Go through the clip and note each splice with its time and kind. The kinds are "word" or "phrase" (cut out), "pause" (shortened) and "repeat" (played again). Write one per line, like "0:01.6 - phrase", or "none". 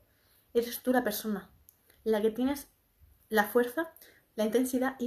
none